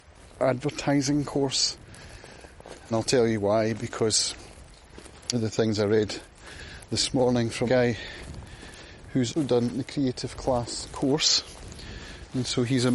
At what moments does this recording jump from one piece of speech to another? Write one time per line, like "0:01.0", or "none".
0:02.9
0:05.3
0:07.7
0:09.4